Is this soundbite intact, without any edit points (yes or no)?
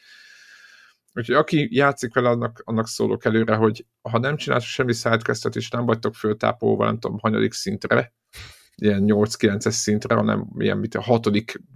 yes